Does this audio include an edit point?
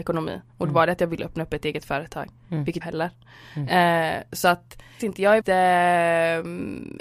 yes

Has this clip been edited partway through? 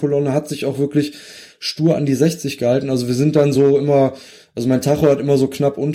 no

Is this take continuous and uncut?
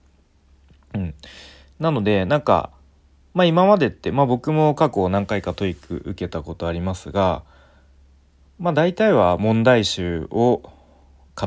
yes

